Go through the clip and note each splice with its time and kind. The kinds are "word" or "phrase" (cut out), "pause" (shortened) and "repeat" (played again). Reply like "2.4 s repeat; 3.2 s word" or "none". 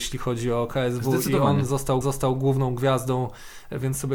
2.0 s repeat